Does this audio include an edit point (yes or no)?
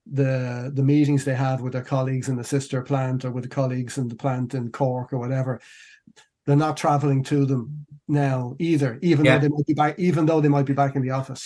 no